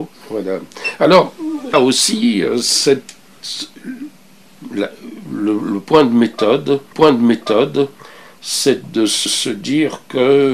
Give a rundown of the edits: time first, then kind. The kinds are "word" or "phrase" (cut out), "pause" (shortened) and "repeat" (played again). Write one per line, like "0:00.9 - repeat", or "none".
0:01.7 - word
0:06.9 - repeat
0:09.3 - repeat

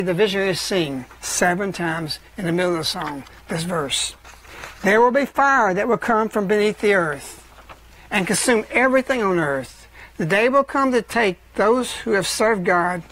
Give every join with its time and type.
none

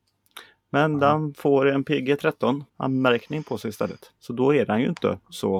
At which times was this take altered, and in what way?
0:02.7 - pause
0:04.2 - pause

